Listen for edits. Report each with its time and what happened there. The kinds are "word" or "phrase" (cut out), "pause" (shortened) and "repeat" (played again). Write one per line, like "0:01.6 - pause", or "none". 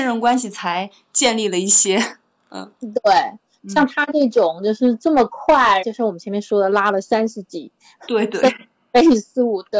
0:05.8 - phrase